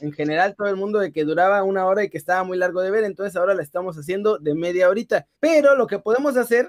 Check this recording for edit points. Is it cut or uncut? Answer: cut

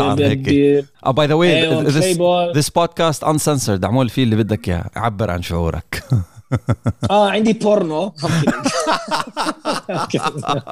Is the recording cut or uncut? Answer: cut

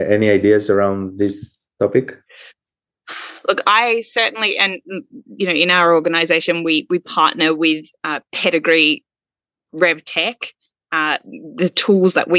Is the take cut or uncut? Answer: uncut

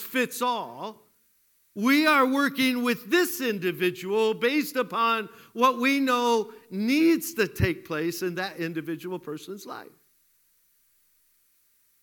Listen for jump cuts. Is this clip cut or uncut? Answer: uncut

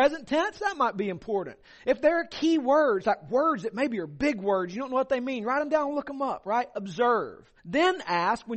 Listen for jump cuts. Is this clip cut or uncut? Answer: cut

